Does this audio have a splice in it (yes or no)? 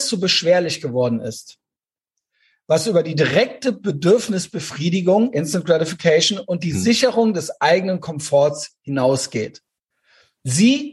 no